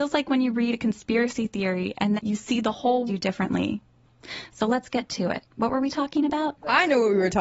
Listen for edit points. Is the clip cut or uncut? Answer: cut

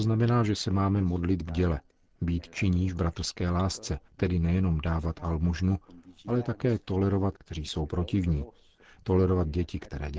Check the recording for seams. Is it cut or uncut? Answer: cut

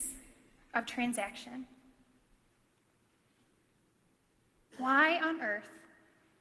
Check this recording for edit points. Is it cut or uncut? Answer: uncut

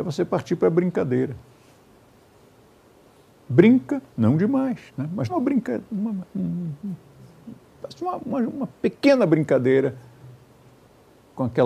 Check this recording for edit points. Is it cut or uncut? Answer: cut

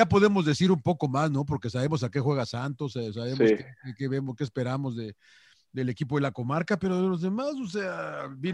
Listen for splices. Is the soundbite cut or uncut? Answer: uncut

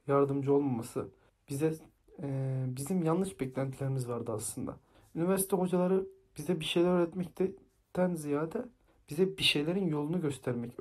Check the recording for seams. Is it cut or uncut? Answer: uncut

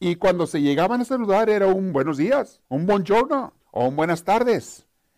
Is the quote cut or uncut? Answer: cut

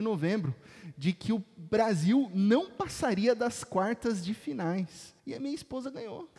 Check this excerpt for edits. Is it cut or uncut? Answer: cut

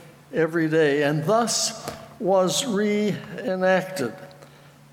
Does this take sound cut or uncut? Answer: uncut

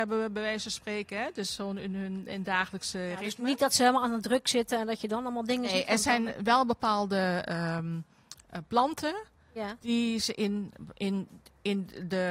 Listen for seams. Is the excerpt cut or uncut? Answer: uncut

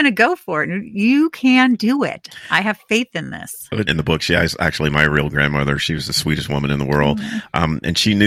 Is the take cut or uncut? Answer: cut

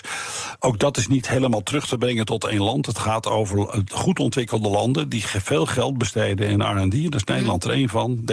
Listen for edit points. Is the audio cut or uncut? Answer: uncut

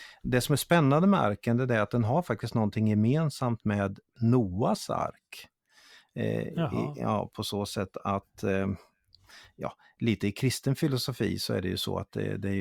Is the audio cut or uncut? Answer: uncut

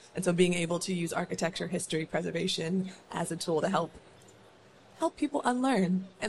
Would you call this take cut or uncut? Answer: uncut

